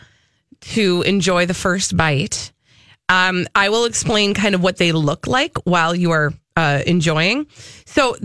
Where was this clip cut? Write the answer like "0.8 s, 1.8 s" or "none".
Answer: 6.4 s